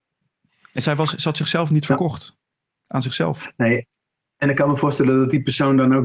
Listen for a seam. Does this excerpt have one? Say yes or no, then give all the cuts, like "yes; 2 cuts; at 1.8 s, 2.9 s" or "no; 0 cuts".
no; 0 cuts